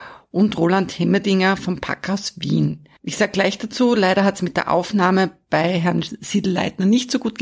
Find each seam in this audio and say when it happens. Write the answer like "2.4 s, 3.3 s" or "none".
3.0 s